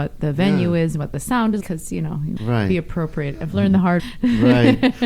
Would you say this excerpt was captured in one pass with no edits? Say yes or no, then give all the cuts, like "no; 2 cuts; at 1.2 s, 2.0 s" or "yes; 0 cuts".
no; 3 cuts; at 1.6 s, 2.4 s, 4.0 s